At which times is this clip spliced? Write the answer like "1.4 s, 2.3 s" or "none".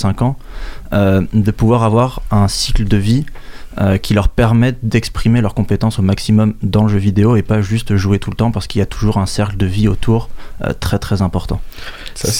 none